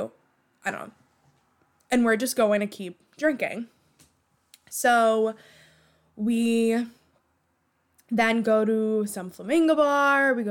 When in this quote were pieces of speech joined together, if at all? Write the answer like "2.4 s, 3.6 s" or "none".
none